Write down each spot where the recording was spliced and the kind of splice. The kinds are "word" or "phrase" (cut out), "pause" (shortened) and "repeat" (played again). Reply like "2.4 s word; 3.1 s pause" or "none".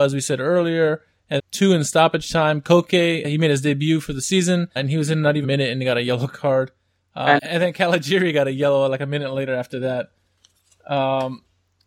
1.4 s word; 3.2 s word; 4.8 s word; 5.4 s word; 7.4 s word